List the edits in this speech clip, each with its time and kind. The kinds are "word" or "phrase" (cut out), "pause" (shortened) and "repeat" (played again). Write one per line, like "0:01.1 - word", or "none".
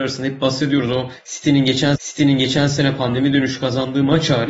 0:02.0 - repeat

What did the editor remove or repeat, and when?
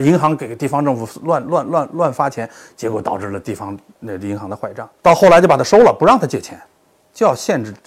0:05.0 - pause

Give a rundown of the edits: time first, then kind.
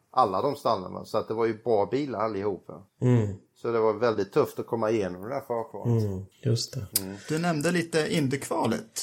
0:02.9 - pause
0:06.3 - pause
0:06.9 - pause

